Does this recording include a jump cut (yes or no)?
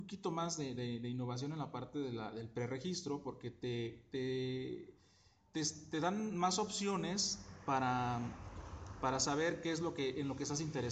no